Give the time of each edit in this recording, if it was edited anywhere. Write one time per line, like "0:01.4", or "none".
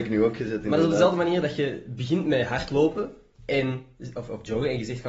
none